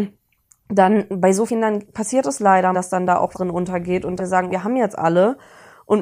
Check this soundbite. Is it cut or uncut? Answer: cut